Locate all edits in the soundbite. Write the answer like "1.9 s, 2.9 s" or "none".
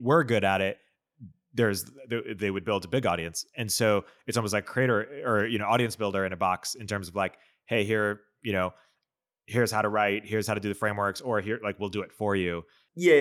none